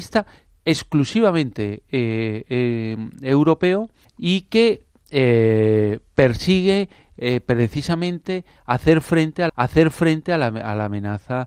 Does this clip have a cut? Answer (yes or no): yes